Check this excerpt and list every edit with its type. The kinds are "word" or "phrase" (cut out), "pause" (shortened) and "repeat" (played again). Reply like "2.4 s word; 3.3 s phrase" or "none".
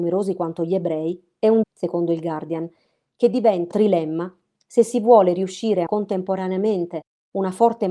1.6 s word; 3.7 s word; 5.9 s word